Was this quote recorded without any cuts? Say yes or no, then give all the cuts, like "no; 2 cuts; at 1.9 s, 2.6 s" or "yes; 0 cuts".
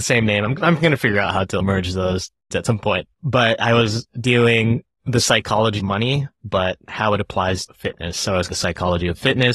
no; 5 cuts; at 2.5 s, 3.1 s, 5.8 s, 7.7 s, 8.5 s